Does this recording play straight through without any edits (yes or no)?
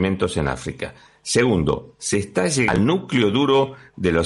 yes